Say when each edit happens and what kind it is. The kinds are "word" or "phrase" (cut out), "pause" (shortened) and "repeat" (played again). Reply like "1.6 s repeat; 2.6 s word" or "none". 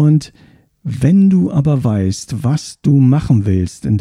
none